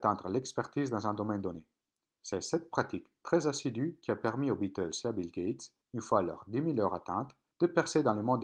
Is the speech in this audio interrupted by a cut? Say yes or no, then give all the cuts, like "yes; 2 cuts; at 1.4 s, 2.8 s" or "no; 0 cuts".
no; 0 cuts